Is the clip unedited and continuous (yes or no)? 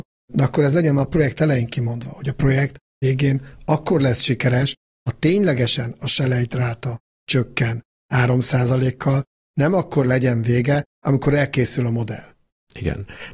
yes